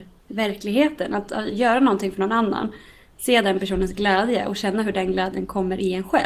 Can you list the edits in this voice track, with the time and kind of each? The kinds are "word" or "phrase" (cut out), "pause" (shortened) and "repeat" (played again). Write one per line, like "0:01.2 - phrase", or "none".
none